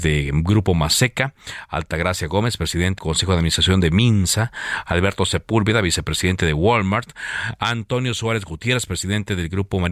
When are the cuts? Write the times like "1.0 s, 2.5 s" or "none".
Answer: 3.0 s

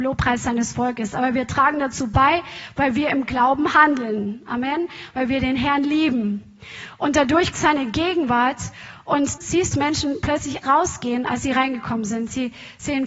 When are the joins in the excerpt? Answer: 7.5 s, 9.4 s, 9.7 s, 10.6 s

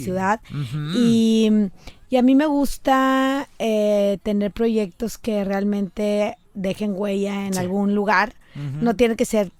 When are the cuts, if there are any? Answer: none

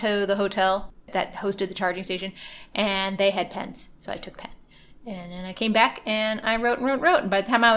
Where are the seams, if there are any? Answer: 4.3 s

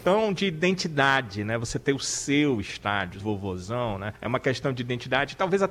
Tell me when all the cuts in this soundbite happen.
3.2 s, 4.2 s

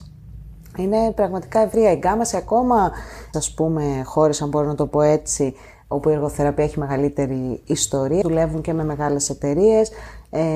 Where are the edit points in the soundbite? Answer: 3.3 s, 8.2 s

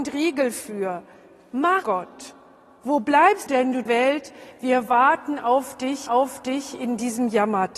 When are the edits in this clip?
1.8 s, 3.5 s, 3.9 s, 6.1 s

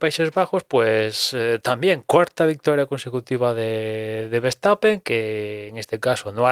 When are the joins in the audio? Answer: none

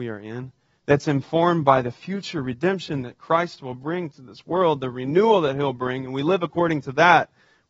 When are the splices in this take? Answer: none

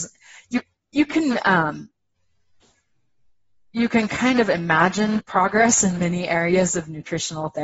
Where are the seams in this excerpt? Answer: none

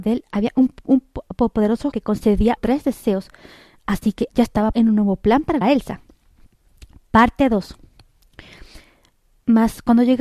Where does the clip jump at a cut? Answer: 1.9 s, 2.6 s, 4.3 s, 4.7 s, 5.6 s

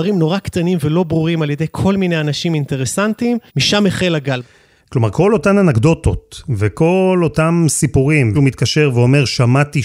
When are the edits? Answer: 3.5 s, 8.3 s

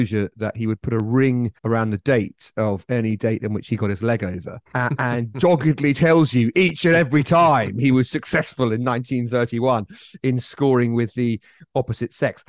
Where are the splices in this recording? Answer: 1.6 s, 4.7 s

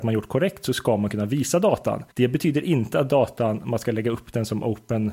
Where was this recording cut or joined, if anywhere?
2.1 s

